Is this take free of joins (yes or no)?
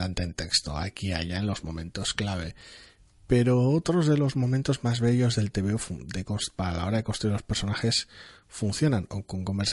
yes